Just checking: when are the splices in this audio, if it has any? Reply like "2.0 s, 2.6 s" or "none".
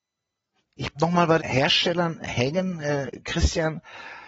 0.9 s, 1.4 s